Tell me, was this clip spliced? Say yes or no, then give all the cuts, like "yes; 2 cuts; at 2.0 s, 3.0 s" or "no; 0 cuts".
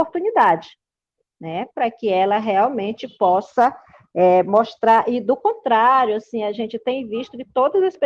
no; 0 cuts